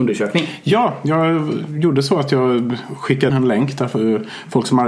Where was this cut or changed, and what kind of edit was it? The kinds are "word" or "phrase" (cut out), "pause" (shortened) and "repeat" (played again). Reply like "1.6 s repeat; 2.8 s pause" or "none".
3.3 s phrase